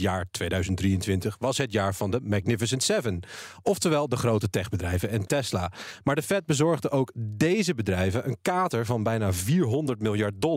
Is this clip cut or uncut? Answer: uncut